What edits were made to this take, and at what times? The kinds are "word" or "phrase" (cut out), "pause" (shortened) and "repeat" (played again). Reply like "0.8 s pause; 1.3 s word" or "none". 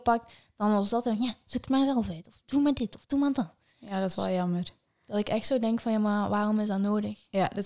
none